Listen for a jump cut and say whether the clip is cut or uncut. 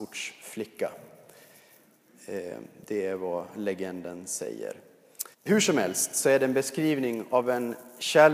cut